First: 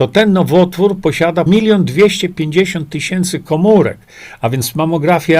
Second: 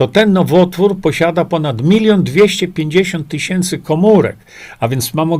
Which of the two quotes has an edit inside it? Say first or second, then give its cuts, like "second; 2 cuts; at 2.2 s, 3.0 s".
first; 1 cut; at 1.5 s